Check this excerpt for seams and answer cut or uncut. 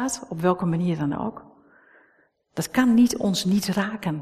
uncut